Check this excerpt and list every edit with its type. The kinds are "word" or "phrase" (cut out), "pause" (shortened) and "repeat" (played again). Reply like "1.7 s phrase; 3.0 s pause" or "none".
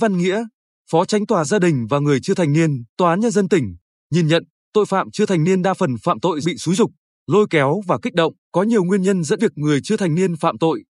2.9 s pause; 6.4 s word; 8.4 s pause; 9.4 s word